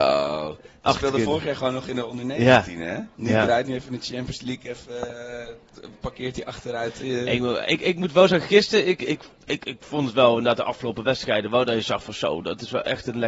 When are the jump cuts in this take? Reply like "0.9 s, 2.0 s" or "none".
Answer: 3.1 s, 9.3 s